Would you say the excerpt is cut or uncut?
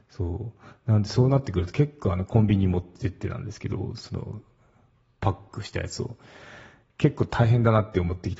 uncut